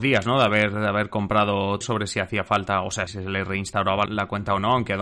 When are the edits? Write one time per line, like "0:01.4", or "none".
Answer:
0:01.8
0:03.1
0:04.1